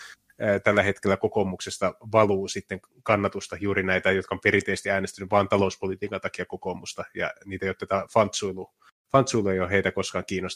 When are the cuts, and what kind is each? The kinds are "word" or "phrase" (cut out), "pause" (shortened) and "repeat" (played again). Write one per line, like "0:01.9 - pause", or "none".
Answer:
none

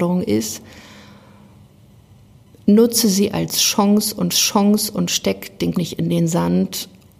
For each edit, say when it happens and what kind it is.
0:04.3 - repeat
0:05.7 - word

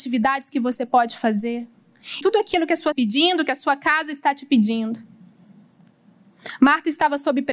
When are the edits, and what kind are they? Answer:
0:02.2 - word
0:02.9 - phrase

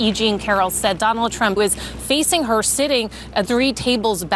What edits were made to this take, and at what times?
0:01.0 - word
0:01.6 - word
0:03.5 - word

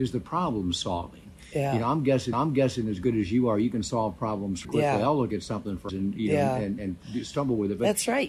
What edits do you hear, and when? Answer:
0:02.3 - repeat
0:04.6 - word
0:05.9 - word

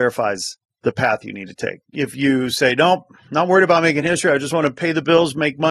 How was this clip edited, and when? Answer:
0:01.9 - pause

